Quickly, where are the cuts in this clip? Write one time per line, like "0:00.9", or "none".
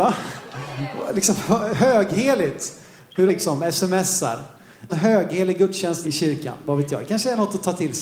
0:03.3
0:04.9
0:06.0